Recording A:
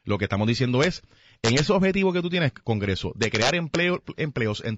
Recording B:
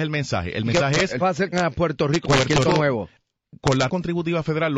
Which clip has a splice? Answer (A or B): B